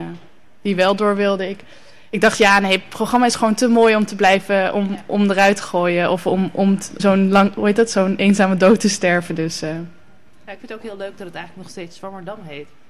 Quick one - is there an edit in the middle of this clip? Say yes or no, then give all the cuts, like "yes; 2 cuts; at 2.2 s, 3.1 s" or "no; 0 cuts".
yes; 1 cut; at 7.0 s